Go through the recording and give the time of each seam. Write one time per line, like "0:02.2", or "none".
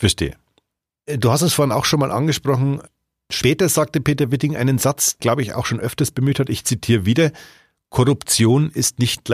0:05.2